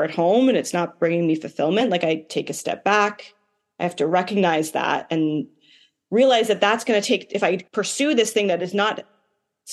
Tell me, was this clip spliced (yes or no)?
yes